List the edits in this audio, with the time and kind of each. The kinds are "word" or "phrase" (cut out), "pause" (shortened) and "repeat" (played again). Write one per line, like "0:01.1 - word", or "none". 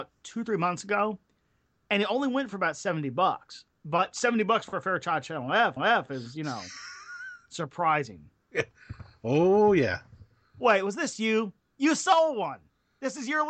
0:05.8 - repeat